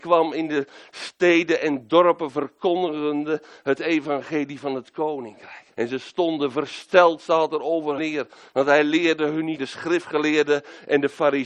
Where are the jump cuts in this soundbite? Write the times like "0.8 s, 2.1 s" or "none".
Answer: 5.7 s, 8.0 s, 9.6 s